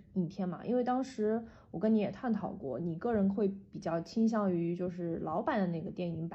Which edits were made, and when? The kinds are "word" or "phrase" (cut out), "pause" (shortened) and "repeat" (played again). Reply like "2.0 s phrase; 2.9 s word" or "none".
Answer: none